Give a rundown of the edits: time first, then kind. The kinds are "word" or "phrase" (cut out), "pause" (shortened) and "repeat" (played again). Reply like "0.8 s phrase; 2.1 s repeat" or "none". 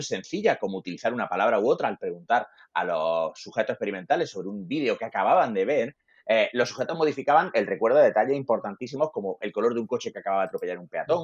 none